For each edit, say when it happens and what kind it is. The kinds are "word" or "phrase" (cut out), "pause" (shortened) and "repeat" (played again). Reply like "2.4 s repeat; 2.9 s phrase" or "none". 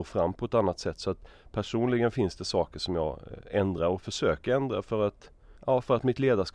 none